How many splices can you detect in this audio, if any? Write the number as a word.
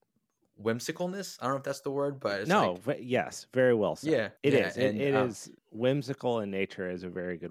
two